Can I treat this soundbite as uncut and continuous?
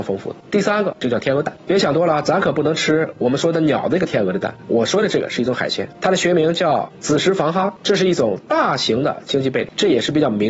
yes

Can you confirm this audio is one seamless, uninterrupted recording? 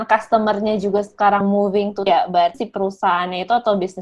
no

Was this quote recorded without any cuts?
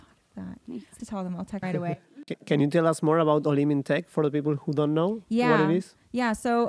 no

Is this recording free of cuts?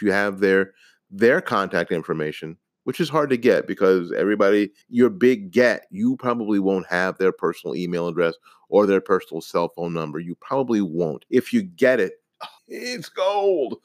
no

